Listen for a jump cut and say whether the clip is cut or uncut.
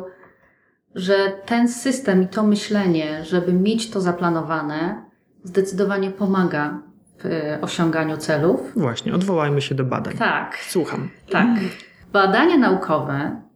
uncut